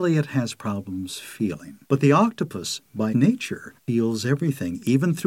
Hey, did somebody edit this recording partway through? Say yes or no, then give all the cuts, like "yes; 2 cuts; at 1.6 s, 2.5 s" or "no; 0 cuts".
yes; 3 cuts; at 1.9 s, 3.1 s, 3.8 s